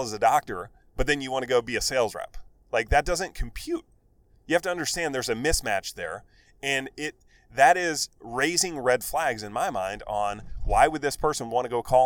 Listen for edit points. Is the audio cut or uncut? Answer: uncut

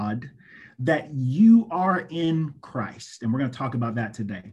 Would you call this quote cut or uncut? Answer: uncut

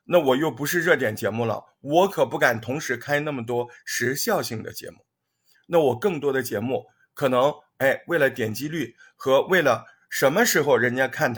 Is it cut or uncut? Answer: uncut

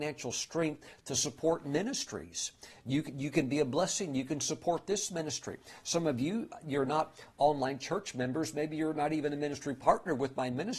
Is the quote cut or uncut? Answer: uncut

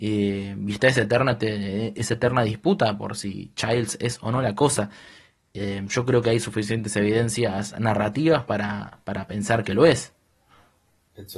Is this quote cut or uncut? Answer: uncut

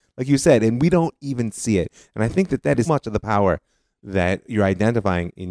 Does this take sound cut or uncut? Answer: cut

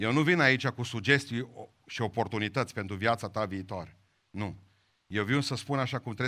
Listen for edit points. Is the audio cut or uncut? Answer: uncut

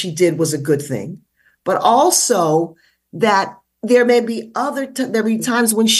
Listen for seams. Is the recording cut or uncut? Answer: uncut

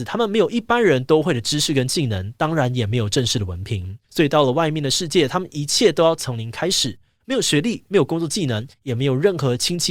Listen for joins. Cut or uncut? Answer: cut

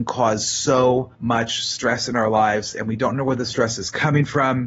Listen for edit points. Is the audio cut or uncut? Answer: cut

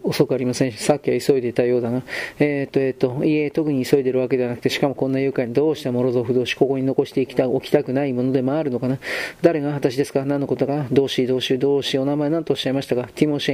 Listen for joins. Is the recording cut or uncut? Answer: uncut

